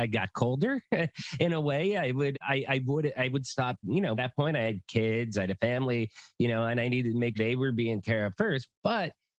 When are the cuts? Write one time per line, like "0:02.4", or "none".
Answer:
0:02.3
0:03.8
0:04.2
0:07.3
0:08.0